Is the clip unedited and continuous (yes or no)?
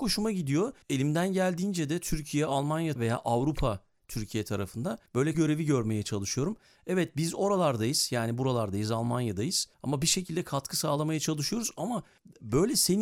no